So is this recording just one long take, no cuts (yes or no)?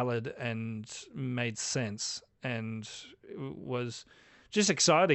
yes